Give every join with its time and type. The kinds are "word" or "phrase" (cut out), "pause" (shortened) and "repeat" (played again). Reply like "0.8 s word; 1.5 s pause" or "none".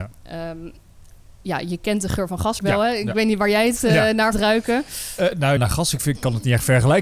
2.6 s word; 4.3 s word; 5.6 s word